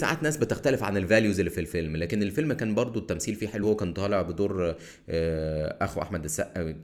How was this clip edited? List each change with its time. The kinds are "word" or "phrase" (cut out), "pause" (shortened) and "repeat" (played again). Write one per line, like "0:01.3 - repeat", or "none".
0:03.6 - word